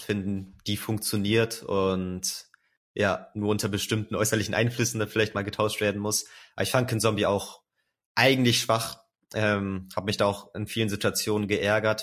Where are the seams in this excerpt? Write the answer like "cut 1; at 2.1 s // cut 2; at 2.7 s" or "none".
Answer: none